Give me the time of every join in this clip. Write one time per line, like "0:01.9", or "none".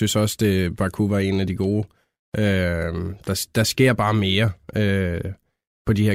none